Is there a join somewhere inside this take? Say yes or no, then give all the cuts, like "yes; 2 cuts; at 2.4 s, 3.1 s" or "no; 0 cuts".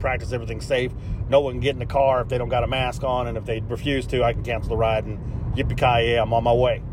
no; 0 cuts